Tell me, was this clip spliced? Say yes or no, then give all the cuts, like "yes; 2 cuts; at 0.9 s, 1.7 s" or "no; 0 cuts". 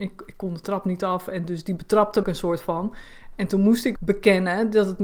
yes; 2 cuts; at 2.2 s, 4.0 s